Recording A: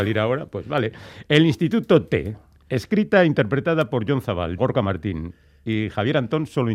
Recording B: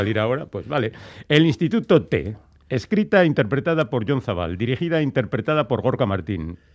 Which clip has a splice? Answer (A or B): A